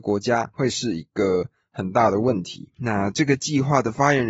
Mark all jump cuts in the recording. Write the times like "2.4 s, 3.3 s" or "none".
none